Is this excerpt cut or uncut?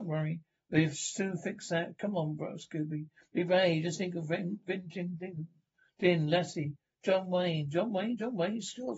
uncut